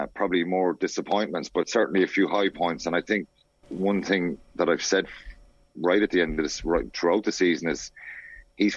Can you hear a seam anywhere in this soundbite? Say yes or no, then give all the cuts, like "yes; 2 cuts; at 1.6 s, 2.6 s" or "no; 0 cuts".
no; 0 cuts